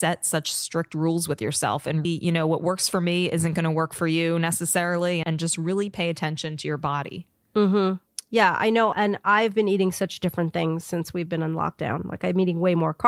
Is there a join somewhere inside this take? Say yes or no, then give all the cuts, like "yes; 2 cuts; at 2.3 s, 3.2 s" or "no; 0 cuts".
yes; 3 cuts; at 2.0 s, 5.2 s, 8.9 s